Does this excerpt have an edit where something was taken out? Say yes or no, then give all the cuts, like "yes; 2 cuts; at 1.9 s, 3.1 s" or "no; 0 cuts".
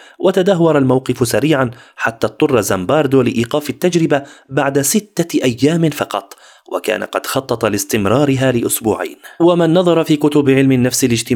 no; 0 cuts